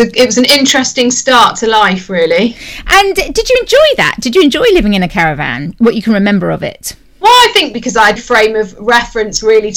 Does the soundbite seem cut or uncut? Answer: cut